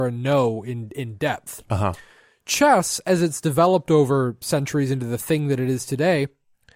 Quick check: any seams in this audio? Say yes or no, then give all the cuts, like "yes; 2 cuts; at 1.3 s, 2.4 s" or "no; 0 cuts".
no; 0 cuts